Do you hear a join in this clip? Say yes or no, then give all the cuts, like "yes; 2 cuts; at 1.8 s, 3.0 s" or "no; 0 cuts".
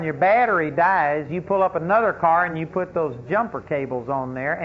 no; 0 cuts